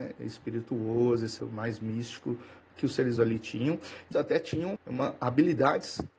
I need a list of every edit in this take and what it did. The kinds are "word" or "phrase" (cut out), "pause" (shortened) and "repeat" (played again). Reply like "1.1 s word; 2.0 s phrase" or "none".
1.4 s word; 3.2 s word; 4.1 s word; 4.8 s word